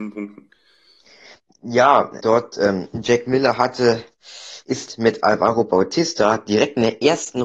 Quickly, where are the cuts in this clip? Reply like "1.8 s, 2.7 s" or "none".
2.2 s